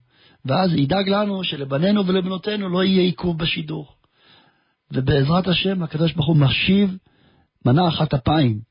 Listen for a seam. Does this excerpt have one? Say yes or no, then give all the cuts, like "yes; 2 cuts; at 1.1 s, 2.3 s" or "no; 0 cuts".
no; 0 cuts